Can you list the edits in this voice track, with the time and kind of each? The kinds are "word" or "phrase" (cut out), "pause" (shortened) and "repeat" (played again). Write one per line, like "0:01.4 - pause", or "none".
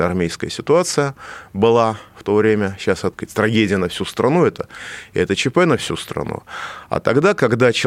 0:03.1 - phrase